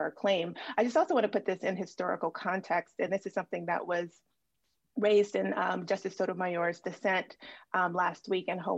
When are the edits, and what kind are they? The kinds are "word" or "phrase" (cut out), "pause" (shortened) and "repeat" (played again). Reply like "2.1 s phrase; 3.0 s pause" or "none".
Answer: none

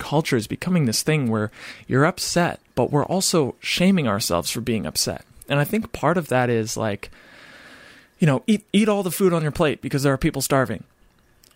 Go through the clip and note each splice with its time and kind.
2.7 s pause; 8.7 s pause

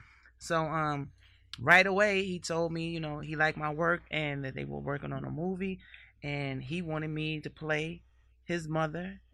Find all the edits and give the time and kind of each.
none

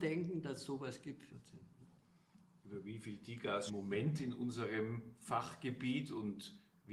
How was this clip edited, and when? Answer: 1.3 s word; 3.7 s phrase

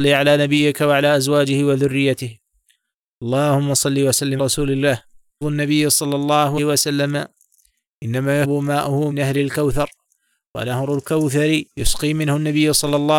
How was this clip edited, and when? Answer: 4.4 s word; 5.4 s word; 6.6 s word; 8.4 s word; 9.1 s word; 11.7 s pause

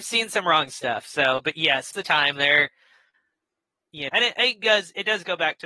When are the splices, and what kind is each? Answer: 1.9 s word; 4.1 s word

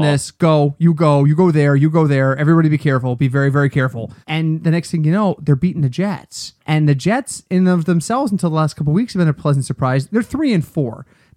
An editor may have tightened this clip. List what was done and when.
4.2 s pause; 6.6 s pause

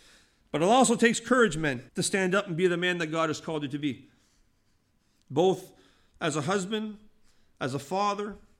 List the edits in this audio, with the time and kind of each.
1.9 s pause

